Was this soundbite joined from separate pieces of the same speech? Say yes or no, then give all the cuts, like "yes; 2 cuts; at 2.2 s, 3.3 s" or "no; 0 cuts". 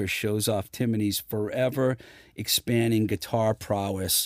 no; 0 cuts